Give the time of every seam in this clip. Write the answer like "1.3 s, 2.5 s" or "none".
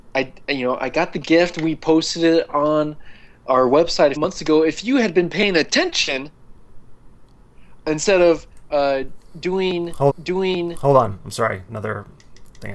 4.2 s, 7.8 s, 10.1 s